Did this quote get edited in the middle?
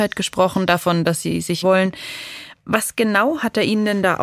yes; 1 cut; at 1.6 s

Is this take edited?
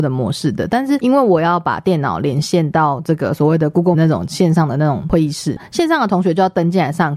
yes; 1 cut; at 3.9 s

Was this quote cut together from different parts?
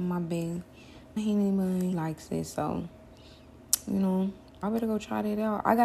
yes; 3 cuts; at 1.2 s, 1.9 s, 4.6 s

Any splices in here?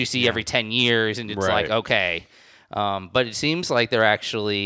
no; 0 cuts

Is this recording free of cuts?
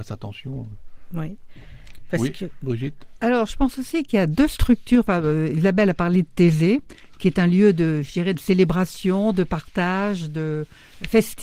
yes; 0 cuts

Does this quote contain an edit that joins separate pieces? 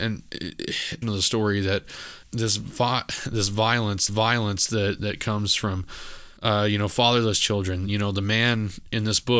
yes; 4 cuts; at 1.0 s, 2.2 s, 4.1 s, 6.4 s

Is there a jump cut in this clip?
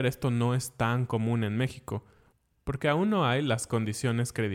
no; 0 cuts

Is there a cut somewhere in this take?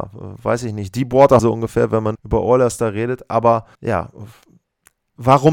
yes; 3 cuts; at 1.4 s, 2.1 s, 3.7 s

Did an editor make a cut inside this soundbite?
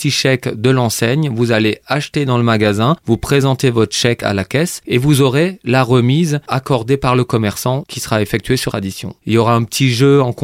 yes; 1 cut; at 8.7 s

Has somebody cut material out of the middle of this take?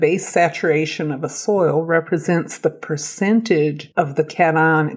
no; 0 cuts

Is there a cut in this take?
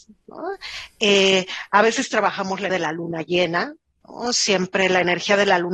yes; 1 cut; at 2.7 s

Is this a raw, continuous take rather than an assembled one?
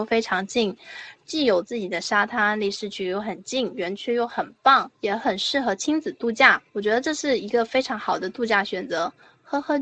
no; 2 cuts; at 5.0 s, 6.7 s

